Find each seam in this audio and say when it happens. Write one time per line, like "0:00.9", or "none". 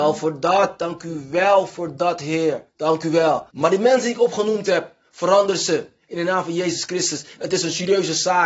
0:02.7
0:03.5